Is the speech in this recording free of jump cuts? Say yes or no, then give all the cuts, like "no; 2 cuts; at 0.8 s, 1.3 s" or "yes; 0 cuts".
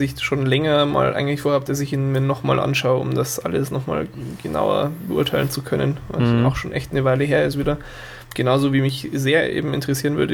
yes; 0 cuts